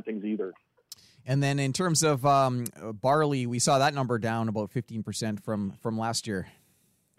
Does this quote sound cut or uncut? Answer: uncut